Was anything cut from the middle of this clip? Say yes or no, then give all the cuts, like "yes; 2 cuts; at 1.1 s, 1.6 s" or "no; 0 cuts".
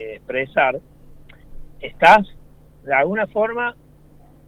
no; 0 cuts